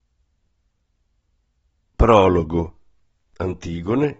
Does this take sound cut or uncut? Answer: uncut